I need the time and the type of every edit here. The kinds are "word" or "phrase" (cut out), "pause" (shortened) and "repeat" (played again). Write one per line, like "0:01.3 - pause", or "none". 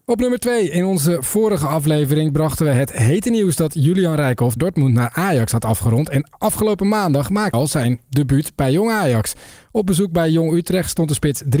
0:04.6 - phrase
0:07.5 - word